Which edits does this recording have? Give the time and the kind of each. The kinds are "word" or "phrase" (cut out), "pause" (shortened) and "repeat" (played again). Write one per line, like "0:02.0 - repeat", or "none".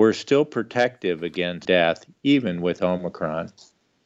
0:01.6 - phrase